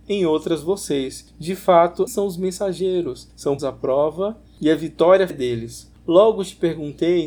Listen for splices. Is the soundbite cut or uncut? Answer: cut